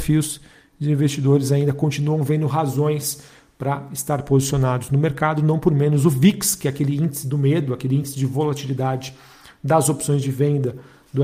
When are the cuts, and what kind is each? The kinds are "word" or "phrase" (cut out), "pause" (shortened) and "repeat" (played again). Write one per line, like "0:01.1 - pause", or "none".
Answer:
none